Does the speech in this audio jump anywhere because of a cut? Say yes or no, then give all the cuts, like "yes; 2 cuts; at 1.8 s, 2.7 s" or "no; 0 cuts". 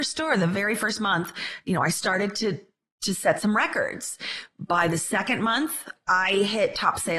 no; 0 cuts